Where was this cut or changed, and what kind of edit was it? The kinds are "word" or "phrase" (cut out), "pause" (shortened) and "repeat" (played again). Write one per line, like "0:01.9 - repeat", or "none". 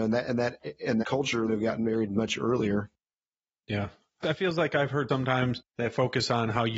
0:01.0 - word
0:01.5 - phrase
0:04.2 - word
0:05.1 - word
0:05.7 - pause